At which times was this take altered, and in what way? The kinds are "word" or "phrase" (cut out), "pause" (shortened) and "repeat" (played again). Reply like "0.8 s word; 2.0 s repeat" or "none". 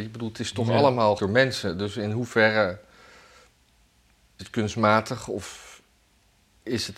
1.2 s word; 4.4 s word